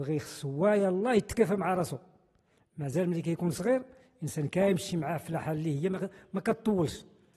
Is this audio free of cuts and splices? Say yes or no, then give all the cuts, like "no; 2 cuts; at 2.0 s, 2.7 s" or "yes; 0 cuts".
yes; 0 cuts